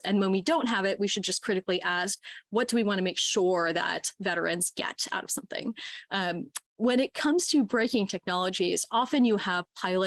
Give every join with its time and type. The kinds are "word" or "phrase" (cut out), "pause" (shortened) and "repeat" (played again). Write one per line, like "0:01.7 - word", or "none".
0:06.7 - pause